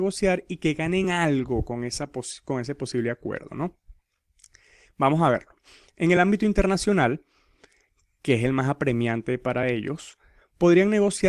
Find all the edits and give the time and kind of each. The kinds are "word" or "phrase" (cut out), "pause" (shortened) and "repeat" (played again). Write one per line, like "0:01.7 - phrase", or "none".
none

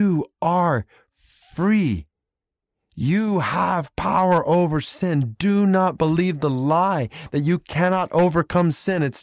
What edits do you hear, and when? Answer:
none

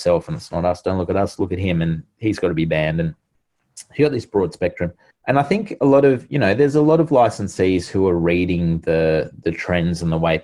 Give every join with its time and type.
0:05.1 - pause

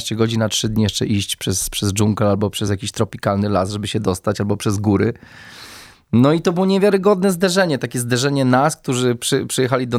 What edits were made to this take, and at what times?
none

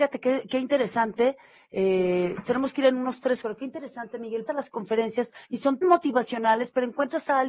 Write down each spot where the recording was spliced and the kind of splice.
0:02.4 - word
0:03.4 - phrase
0:04.5 - phrase
0:05.4 - pause
0:05.8 - word

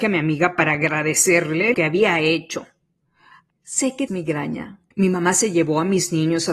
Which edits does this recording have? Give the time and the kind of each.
0:01.7 - word
0:03.5 - phrase
0:04.1 - word
0:04.9 - pause

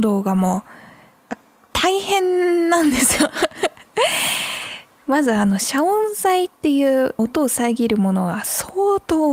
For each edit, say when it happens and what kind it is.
0:06.5 - pause
0:07.2 - phrase

